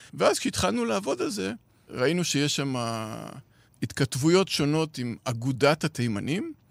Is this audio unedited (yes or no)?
yes